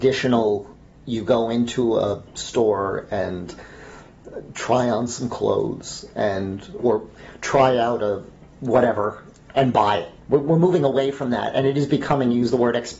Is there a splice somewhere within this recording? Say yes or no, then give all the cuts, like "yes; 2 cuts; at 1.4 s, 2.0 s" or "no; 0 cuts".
yes; 3 cuts; at 6.8 s, 8.4 s, 10.2 s